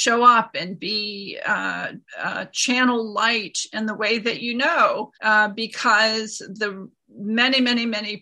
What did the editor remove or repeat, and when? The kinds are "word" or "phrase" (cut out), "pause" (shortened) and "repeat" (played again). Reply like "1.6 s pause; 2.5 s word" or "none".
2.1 s pause; 5.1 s pause